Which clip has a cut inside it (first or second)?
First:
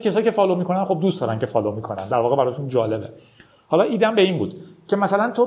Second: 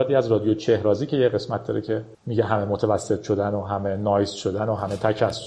second